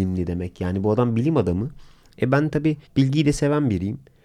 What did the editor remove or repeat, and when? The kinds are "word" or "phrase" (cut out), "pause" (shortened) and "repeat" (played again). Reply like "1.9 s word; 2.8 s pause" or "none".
2.9 s pause